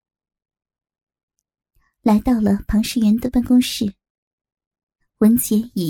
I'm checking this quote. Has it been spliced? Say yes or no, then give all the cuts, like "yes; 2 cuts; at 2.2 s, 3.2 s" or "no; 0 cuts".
no; 0 cuts